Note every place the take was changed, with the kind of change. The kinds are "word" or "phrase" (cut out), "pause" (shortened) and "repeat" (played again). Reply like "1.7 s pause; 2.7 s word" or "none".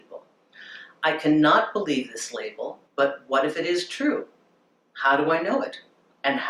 2.9 s pause